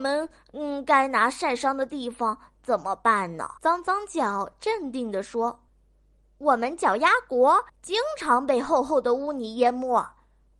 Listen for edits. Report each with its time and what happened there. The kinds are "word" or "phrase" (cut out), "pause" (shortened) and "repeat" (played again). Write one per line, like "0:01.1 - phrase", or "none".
0:03.6 - pause
0:05.7 - pause
0:07.7 - pause